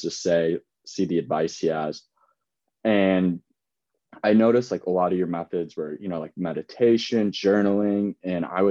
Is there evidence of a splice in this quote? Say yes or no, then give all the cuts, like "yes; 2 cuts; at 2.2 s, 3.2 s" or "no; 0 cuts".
no; 0 cuts